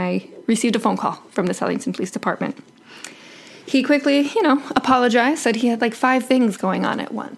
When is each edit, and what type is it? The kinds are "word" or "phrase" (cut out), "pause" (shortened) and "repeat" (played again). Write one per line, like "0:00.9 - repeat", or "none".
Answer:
none